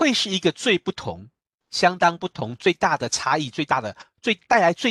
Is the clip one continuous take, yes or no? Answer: yes